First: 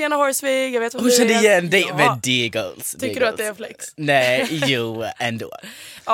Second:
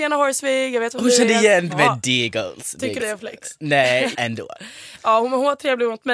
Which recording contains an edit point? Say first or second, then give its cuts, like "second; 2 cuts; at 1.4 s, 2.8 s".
second; 3 cuts; at 1.7 s, 3.0 s, 4.1 s